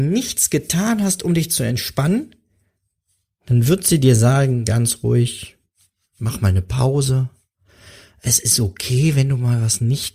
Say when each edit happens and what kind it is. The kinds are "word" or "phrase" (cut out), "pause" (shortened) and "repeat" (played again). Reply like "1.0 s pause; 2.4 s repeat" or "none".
none